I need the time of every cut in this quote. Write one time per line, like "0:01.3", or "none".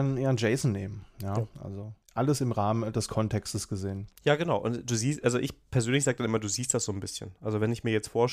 0:02.0
0:04.1